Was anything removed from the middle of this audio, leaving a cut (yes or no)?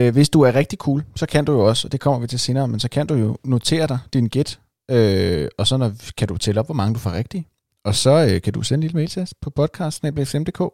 no